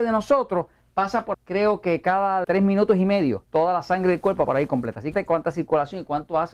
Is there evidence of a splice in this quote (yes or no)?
yes